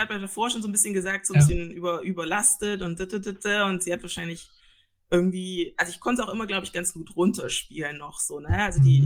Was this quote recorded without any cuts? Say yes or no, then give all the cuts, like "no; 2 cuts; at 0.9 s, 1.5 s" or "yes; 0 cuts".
yes; 0 cuts